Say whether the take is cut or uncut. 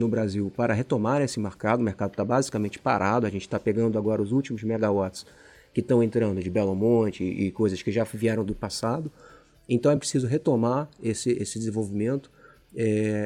uncut